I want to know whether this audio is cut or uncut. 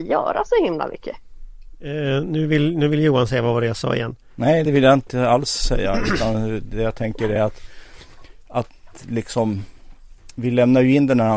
uncut